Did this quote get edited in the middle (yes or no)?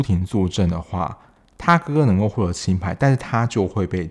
no